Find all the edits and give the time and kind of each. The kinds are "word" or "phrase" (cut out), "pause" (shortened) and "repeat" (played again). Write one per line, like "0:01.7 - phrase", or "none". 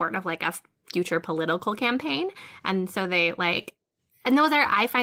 none